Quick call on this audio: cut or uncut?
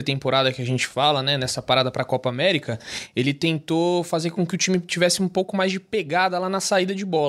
uncut